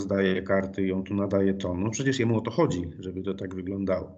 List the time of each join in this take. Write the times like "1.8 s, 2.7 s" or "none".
none

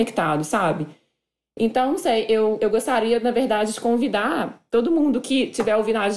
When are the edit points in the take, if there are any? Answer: none

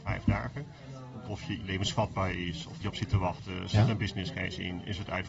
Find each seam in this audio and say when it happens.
1.3 s, 1.6 s, 2.8 s

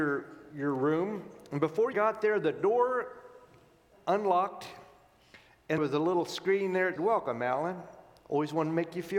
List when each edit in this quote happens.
1.9 s, 3.9 s, 5.8 s, 7.0 s

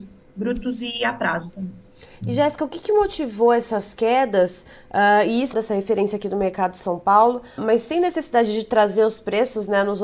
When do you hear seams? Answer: 5.5 s, 7.6 s

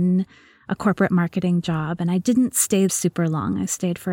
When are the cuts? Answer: 2.9 s

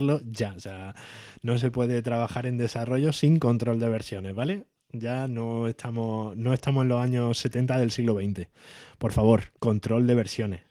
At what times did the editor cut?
9.6 s

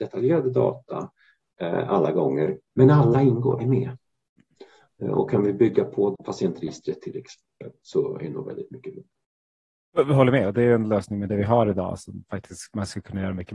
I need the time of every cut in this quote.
3.6 s, 6.2 s, 9.6 s

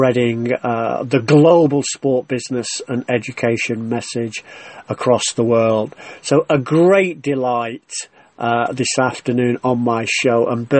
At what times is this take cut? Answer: none

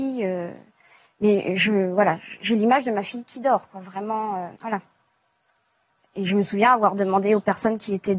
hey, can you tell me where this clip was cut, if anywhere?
4.6 s

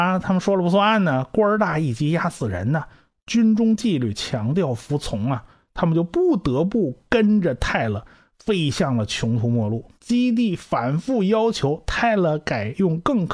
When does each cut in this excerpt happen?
9.9 s

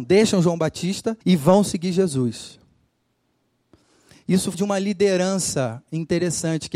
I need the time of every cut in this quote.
1.2 s, 4.5 s

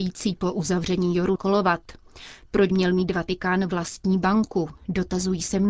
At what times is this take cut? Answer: 1.4 s, 2.7 s

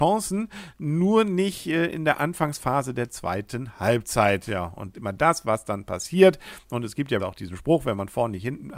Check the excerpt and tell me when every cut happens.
4.9 s, 7.2 s

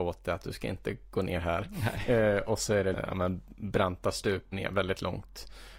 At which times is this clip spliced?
2.9 s, 4.5 s

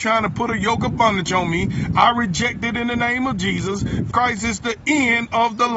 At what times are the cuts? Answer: 4.1 s

